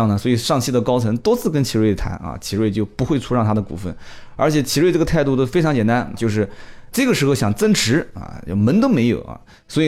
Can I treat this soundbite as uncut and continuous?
no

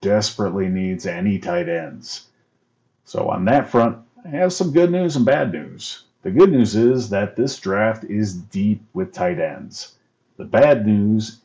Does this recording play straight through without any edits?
yes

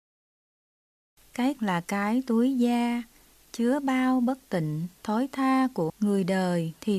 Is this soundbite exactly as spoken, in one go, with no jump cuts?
no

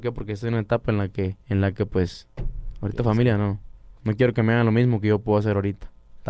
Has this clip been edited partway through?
yes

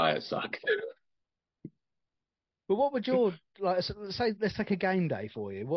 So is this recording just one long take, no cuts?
yes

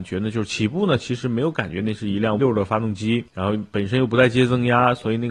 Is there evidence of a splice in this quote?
yes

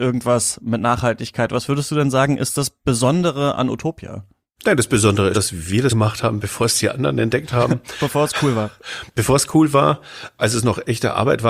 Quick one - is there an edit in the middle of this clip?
yes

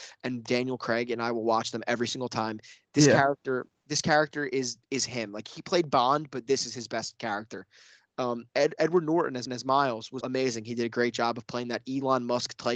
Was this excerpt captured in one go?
no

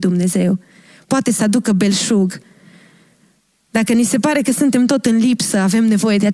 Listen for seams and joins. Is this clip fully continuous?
yes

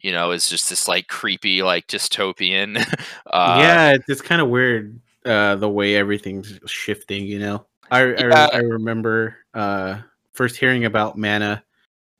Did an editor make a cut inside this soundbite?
yes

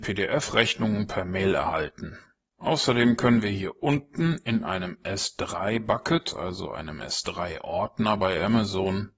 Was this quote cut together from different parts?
no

